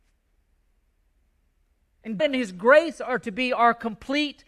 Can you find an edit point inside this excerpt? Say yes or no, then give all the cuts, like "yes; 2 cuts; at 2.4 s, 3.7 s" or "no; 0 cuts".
yes; 1 cut; at 2.2 s